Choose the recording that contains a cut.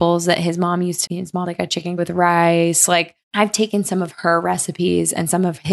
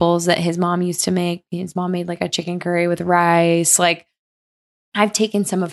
first; 4 cuts; at 1.1 s, 1.4 s, 2.0 s, 3.2 s

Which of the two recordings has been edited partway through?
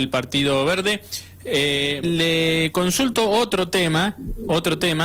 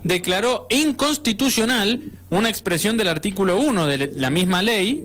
first; 1 cut; at 2.0 s

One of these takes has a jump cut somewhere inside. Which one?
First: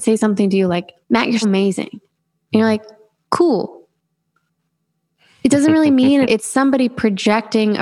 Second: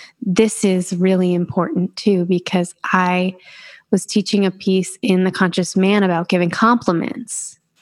first; 3 cuts; at 1.0 s, 1.4 s, 6.2 s

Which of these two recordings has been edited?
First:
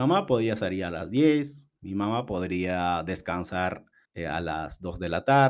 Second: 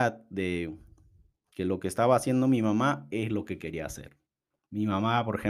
first; 1 cut; at 4.0 s

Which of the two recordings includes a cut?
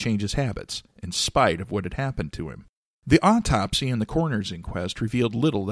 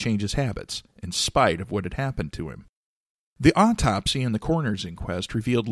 first; 1 cut; at 2.8 s

